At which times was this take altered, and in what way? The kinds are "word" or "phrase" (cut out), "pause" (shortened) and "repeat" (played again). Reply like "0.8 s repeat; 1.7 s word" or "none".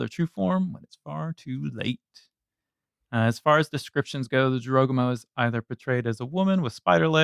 none